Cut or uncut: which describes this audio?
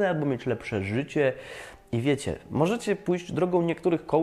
uncut